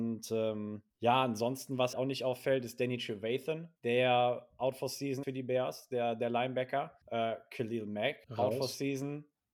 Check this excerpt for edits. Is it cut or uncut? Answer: cut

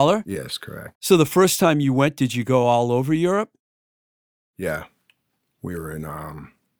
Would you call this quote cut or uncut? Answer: uncut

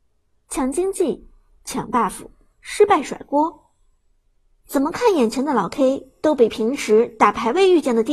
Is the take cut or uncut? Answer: cut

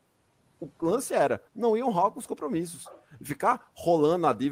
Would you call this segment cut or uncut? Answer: cut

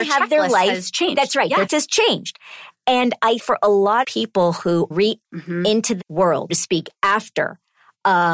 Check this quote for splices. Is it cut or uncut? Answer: cut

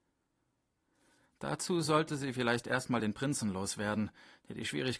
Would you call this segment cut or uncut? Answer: uncut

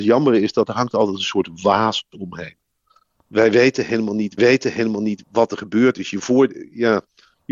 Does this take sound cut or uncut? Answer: cut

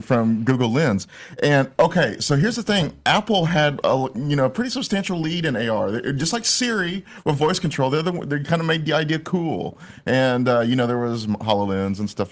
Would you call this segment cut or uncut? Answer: uncut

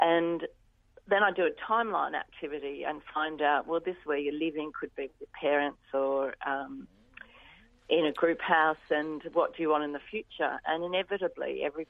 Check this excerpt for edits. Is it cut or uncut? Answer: uncut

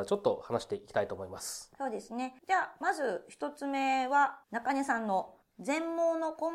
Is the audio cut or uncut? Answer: cut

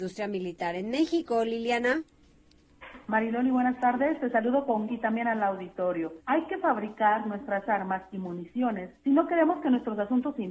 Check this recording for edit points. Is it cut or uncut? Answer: cut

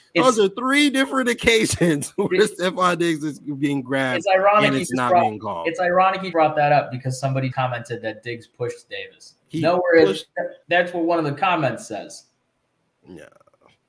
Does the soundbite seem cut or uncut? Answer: cut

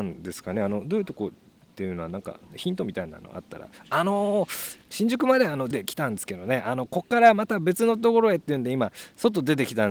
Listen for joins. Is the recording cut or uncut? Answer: cut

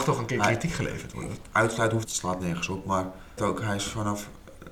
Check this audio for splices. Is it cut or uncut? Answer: cut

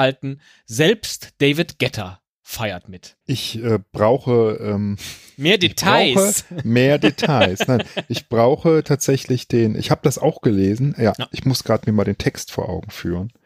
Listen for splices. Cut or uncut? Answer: cut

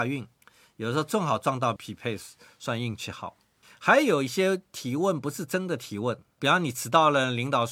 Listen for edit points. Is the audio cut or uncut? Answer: cut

